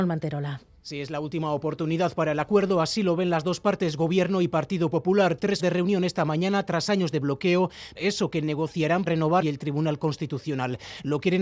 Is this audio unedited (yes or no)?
no